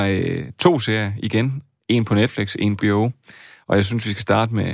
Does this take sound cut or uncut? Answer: cut